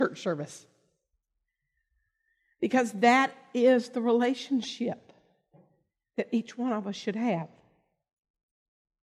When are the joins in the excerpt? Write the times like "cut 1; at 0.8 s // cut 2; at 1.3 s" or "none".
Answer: none